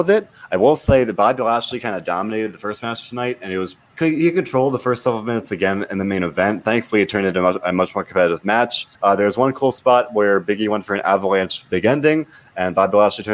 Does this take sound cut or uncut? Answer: cut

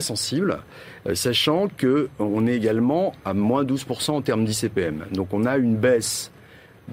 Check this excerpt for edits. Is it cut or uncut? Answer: uncut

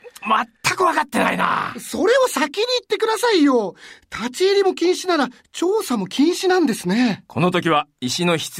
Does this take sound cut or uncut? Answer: uncut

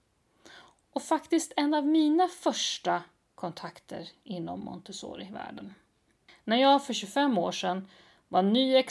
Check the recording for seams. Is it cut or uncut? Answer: uncut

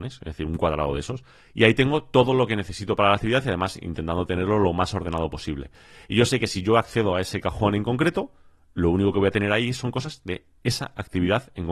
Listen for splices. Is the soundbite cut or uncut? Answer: uncut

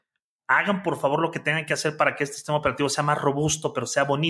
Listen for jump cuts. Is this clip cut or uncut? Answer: uncut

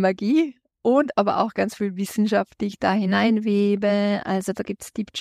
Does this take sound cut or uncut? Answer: uncut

